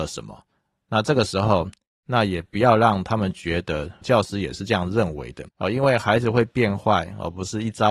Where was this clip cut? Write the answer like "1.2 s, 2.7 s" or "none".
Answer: 4.0 s, 5.5 s